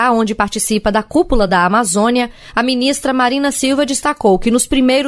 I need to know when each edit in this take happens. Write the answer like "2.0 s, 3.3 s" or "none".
none